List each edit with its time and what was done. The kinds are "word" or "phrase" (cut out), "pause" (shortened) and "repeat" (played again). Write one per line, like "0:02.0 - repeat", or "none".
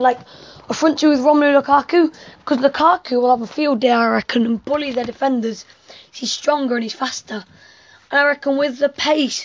none